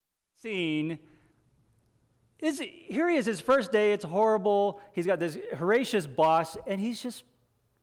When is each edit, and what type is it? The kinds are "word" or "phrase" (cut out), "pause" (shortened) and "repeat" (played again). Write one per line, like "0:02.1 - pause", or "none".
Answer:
none